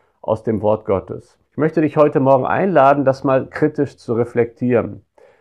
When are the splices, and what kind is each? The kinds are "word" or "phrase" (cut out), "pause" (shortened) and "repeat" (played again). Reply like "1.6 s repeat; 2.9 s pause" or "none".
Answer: 1.5 s pause

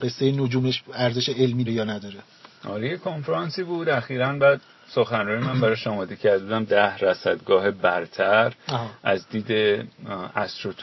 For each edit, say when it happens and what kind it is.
1.7 s word

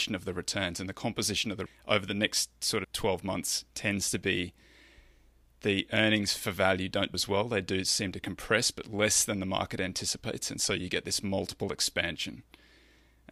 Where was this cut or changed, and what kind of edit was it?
1.7 s word; 2.8 s word; 7.1 s word

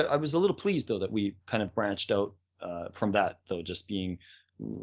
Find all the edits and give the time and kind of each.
none

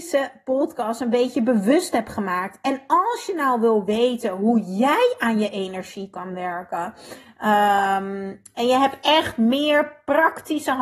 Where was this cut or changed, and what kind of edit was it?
none

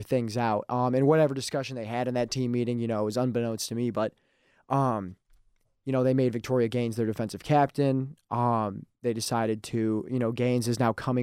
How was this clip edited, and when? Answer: none

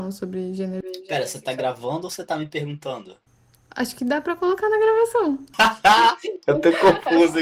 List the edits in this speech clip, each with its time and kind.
none

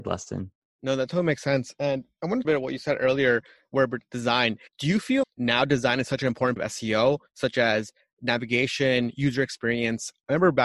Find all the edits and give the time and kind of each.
2.4 s phrase; 4.7 s pause; 5.2 s word; 6.6 s word

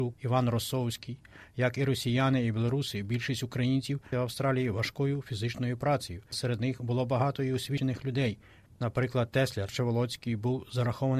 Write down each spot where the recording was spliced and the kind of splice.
4.1 s word; 6.3 s word; 9.7 s word

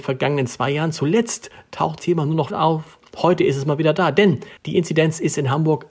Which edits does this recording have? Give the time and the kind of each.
2.0 s word; 2.5 s word; 4.6 s pause

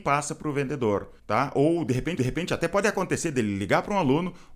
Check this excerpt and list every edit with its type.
1.2 s pause; 2.2 s repeat

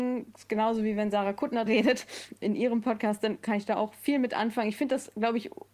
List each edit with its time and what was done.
1.7 s word; 2.4 s word

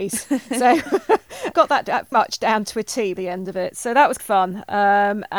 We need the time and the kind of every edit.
1.5 s word; 2.1 s word; 3.2 s word; 4.2 s word

